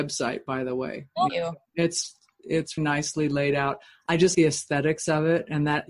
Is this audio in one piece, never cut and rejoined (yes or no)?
no